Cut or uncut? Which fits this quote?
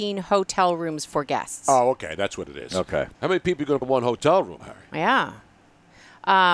cut